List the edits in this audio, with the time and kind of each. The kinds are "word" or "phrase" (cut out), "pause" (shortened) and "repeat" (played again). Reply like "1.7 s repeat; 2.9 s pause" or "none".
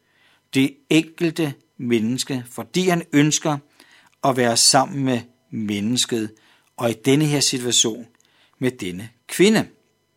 none